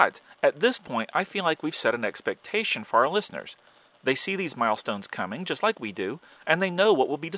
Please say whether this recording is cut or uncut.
uncut